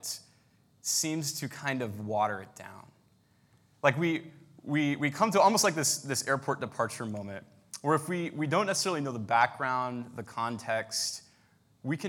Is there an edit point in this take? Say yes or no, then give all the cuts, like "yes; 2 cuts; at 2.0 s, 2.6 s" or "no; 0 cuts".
no; 0 cuts